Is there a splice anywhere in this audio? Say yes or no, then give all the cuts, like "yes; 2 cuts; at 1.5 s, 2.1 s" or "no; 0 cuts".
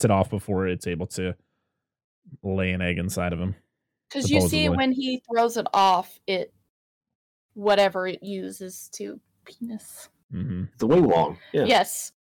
yes; 1 cut; at 9.4 s